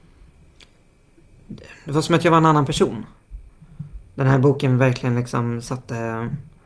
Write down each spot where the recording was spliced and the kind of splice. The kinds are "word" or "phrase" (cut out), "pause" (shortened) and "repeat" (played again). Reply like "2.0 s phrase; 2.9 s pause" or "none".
4.1 s pause